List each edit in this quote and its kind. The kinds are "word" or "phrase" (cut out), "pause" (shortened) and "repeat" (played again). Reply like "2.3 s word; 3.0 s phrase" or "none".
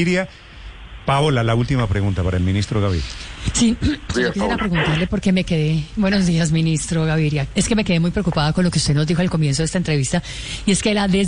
4.1 s word